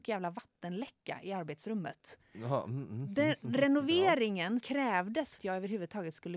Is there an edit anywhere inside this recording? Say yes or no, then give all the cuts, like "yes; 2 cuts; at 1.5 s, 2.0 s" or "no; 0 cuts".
yes; 2 cuts; at 4.6 s, 5.4 s